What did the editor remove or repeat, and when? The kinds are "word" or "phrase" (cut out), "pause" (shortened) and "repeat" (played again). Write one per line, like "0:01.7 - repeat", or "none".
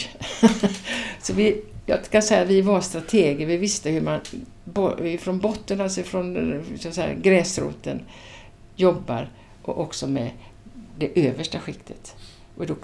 none